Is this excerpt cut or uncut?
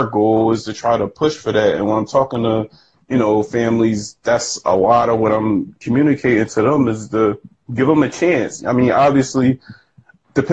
uncut